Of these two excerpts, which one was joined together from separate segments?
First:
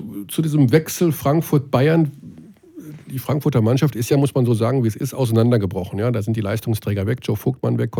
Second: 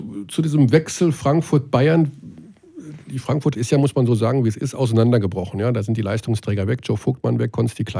second; 1 cut; at 3.5 s

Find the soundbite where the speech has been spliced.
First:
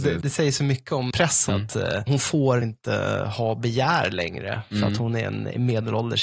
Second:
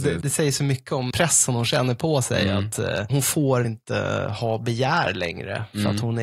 first; 1 cut; at 1.5 s

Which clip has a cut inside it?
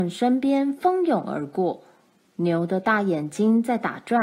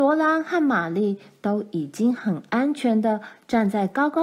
first; 1 cut; at 2.1 s

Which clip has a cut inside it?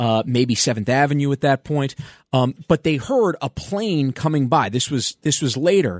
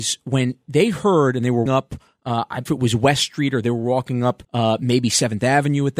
second; 3 cuts; at 1.7 s, 2.7 s, 4.4 s

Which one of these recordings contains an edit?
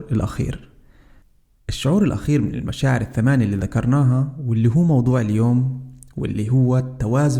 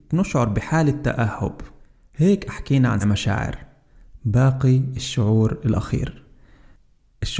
second; 2 cuts; at 1.8 s, 3.0 s

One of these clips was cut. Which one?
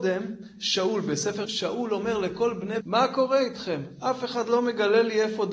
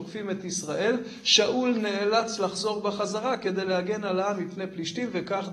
first; 2 cuts; at 1.5 s, 2.8 s

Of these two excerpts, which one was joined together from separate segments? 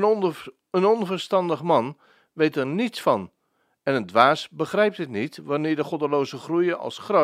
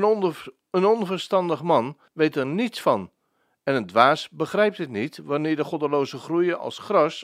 second; 1 cut; at 2.1 s

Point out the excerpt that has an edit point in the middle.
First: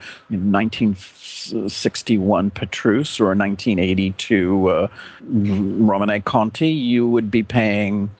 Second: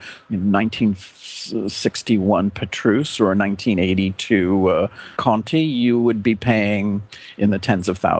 second; 1 cut; at 5.2 s

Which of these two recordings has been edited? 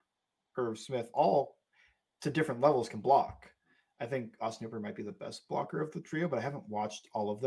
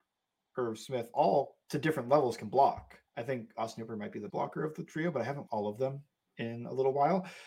second; 4 cuts; at 1.6 s, 3.1 s, 4.3 s, 5.5 s

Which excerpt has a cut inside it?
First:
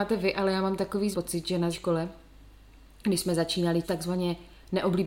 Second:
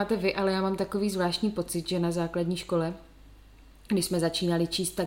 first; 3 cuts; at 1.1 s, 1.7 s, 3.8 s

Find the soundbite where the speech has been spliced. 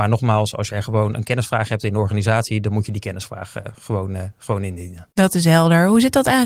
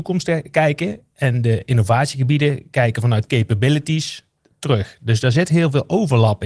first; 1 cut; at 5.1 s

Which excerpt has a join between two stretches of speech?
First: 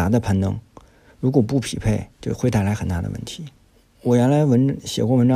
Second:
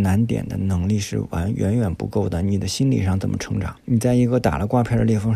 second; 1 cut; at 3.8 s

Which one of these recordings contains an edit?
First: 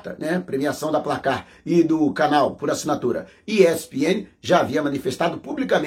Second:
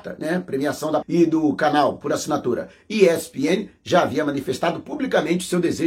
second; 1 cut; at 1.0 s

